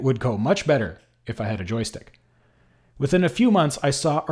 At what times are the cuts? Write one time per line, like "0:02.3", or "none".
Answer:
none

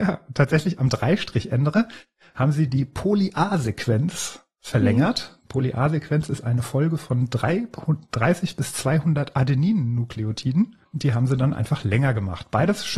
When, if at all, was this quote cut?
none

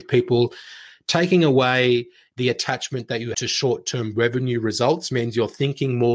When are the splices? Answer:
0:03.3

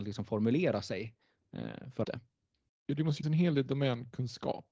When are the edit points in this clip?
0:02.0
0:03.2

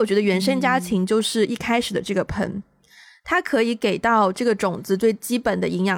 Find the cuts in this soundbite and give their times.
none

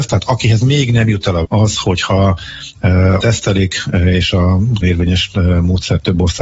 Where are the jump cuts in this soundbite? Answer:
0:01.4
0:03.2
0:04.8

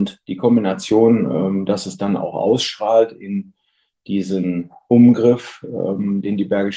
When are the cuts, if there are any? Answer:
none

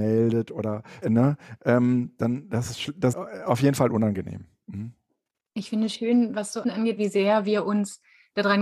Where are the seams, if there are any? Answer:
0:01.0
0:03.1
0:06.6
0:07.0

